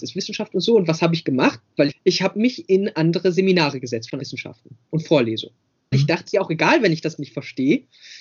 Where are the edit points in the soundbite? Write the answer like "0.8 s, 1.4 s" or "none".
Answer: 1.9 s, 4.2 s, 5.9 s, 6.3 s, 7.2 s